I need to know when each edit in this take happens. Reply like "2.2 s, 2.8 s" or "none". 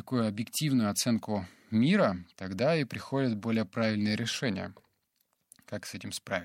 none